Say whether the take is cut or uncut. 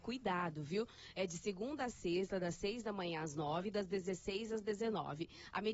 uncut